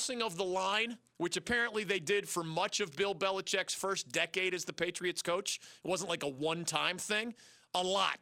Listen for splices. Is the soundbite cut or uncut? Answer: uncut